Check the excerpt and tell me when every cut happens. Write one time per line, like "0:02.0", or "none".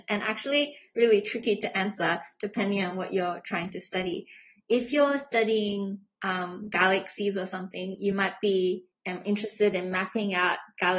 none